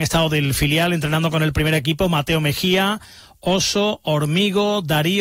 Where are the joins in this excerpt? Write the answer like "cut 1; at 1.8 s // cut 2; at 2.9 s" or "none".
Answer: none